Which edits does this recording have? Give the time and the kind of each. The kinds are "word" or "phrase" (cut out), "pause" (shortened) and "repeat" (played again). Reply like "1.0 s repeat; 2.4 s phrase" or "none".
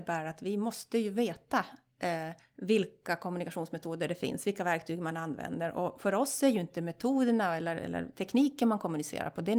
2.4 s pause